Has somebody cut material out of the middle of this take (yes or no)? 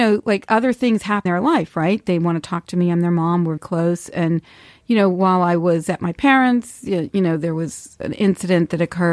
yes